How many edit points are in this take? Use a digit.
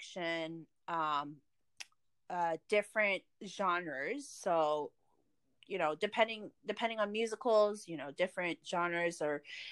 0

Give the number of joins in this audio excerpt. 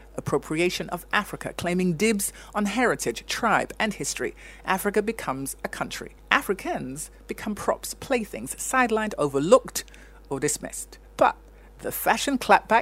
2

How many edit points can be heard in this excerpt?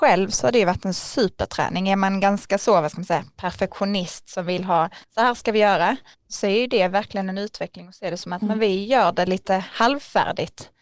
2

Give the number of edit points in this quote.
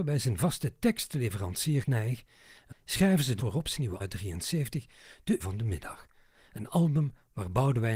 5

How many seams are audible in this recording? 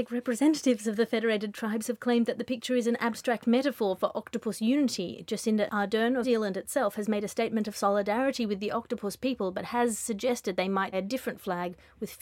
2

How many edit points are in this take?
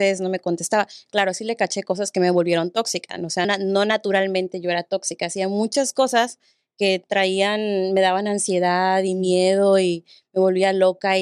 1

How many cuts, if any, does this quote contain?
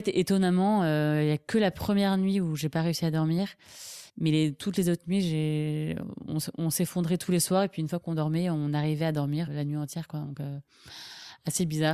2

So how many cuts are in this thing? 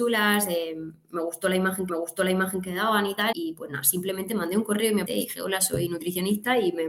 3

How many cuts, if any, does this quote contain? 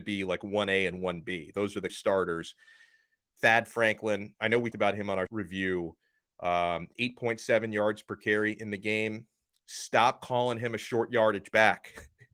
3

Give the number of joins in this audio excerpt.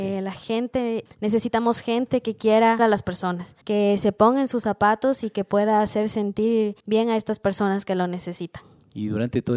4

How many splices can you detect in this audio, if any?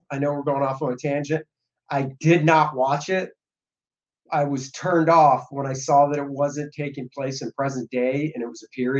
0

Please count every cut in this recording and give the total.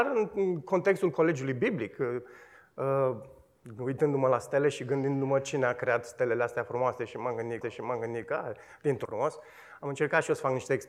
2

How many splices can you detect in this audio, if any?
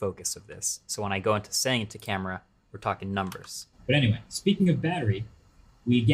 0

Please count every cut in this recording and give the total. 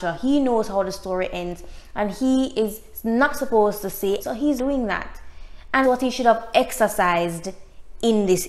3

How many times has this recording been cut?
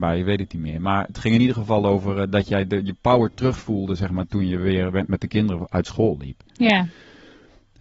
0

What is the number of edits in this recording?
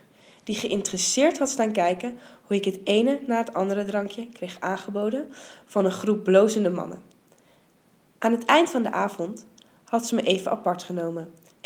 0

